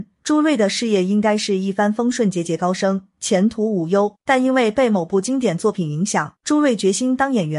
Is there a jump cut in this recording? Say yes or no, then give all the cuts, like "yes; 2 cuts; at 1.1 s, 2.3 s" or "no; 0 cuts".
yes; 2 cuts; at 4.2 s, 6.4 s